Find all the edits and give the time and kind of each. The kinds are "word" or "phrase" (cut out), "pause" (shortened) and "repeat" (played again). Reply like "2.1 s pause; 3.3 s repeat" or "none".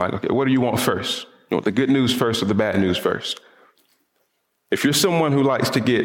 none